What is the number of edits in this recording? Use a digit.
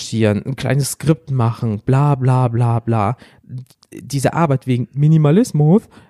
0